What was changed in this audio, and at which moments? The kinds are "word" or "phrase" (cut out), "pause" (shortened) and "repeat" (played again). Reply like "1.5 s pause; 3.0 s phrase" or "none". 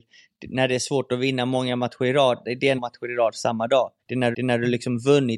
2.8 s phrase; 4.0 s pause; 4.3 s repeat

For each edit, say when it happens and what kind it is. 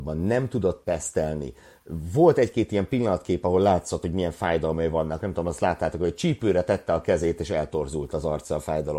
none

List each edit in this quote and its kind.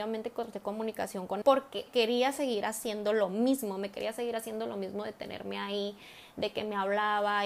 1.4 s word; 1.9 s word

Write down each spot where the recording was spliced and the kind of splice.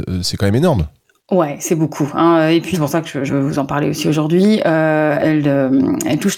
2.7 s word; 3.3 s word; 5.2 s word

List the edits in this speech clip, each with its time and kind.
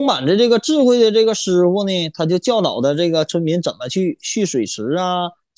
none

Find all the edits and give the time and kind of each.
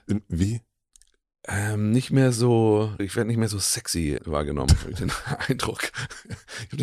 3.0 s word; 4.2 s word

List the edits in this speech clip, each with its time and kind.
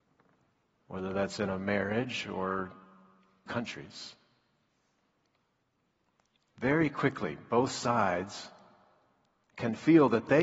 3.5 s word

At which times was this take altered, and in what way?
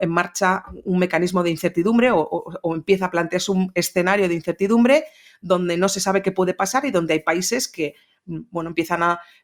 none

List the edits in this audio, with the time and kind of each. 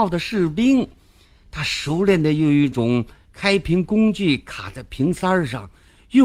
none

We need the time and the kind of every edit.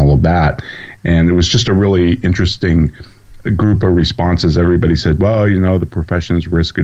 none

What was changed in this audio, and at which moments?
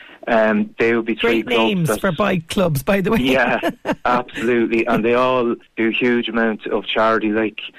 5.7 s pause

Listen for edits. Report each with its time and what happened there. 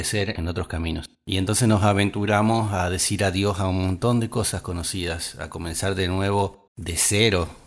1.1 s pause; 6.7 s pause

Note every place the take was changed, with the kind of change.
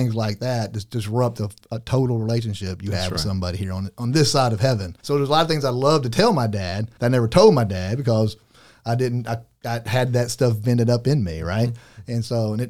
5.0 s pause; 7.0 s pause

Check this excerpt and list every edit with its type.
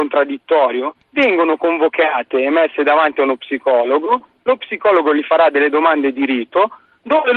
1.0 s pause

